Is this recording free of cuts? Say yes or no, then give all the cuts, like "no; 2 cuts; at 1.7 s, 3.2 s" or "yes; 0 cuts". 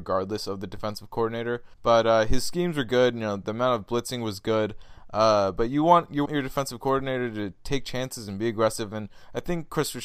no; 2 cuts; at 1.7 s, 6.3 s